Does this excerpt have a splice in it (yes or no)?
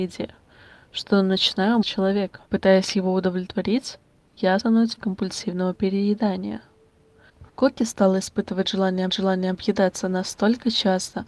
yes